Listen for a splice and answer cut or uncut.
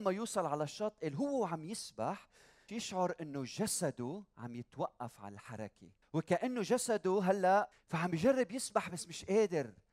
cut